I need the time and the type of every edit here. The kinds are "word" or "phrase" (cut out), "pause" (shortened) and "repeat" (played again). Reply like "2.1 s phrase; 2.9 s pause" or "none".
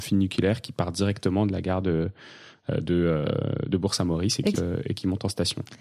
4.5 s word